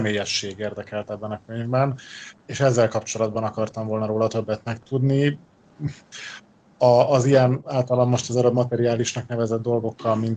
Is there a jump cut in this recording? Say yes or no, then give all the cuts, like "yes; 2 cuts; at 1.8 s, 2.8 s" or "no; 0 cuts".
no; 0 cuts